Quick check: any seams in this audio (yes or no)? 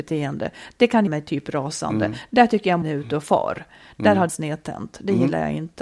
yes